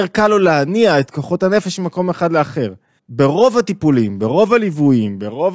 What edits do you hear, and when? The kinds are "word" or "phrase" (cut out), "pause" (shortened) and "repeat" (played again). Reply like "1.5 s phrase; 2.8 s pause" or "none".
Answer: 3.0 s pause